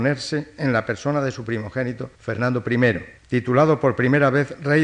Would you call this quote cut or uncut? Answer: cut